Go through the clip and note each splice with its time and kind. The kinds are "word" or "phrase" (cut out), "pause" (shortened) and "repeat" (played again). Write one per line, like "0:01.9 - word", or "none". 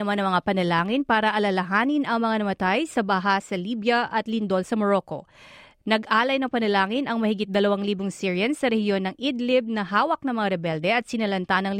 none

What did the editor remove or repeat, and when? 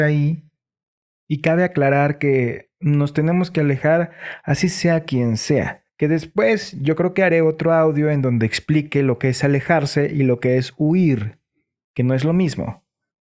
none

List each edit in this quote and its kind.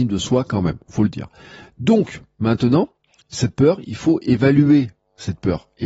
none

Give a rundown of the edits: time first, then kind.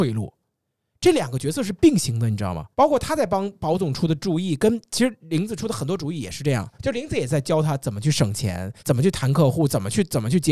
0:02.7 - pause
0:06.7 - pause
0:08.8 - pause

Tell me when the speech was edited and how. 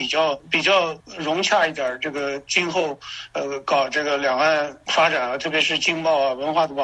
0:01.0 - pause

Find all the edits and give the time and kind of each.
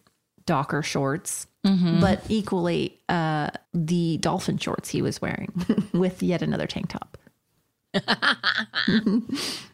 0:01.5 - pause
0:03.6 - pause

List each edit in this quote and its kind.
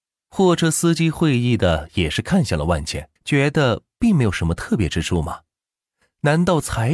0:03.2 - pause

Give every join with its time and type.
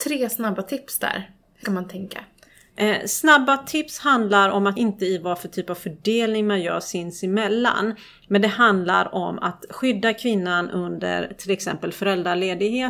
0:01.6 - word
0:04.8 - phrase

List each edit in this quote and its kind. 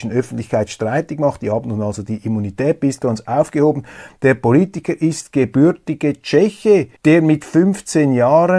0:07.0 - pause

